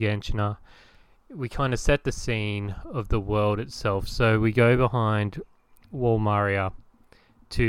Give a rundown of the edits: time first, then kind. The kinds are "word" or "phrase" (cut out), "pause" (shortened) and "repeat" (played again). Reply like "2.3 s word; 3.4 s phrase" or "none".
none